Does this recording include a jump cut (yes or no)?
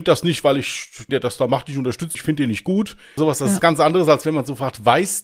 yes